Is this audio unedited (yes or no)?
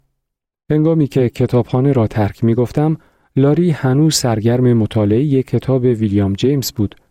yes